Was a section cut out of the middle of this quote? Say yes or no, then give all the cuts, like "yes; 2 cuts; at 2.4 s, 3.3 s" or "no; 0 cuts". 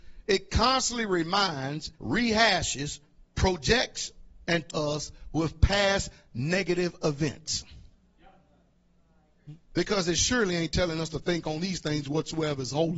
yes; 3 cuts; at 1.9 s, 4.7 s, 9.6 s